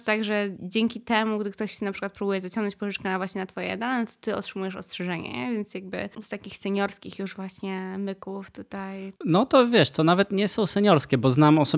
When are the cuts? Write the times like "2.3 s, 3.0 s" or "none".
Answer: none

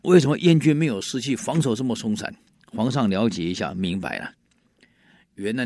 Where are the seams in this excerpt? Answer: none

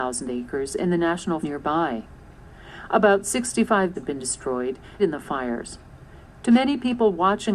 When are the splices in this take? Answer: 1.4 s, 3.9 s, 5.0 s

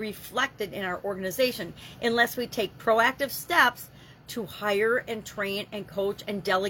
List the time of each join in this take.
none

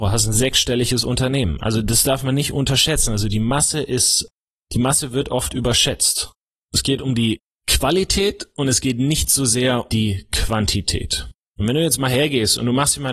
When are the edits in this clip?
9.9 s

